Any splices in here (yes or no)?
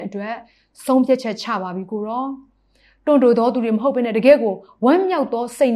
no